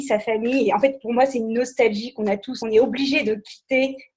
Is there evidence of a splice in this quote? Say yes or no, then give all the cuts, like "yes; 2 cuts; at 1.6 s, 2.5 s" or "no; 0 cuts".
yes; 1 cut; at 2.6 s